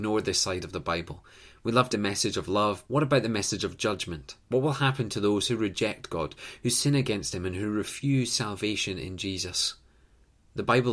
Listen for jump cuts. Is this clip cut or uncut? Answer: cut